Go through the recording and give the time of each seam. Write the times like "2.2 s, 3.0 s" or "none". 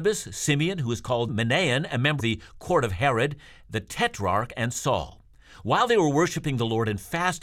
1.3 s, 2.2 s